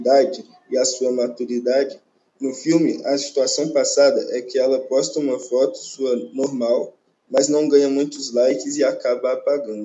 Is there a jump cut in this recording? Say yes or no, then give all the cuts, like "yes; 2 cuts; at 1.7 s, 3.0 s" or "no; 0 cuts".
no; 0 cuts